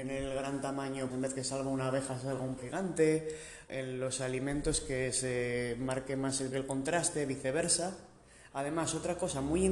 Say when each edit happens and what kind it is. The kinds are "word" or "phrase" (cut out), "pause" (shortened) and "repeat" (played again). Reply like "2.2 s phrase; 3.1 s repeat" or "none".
1.1 s word; 2.6 s word; 3.7 s word; 6.5 s word